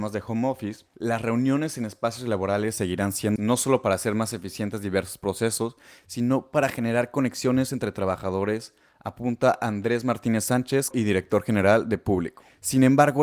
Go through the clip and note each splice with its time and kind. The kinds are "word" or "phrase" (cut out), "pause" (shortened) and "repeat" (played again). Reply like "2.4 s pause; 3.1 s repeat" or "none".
3.4 s word; 10.9 s word